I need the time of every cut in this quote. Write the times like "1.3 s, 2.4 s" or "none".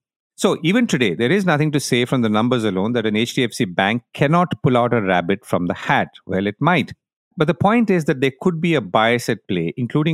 none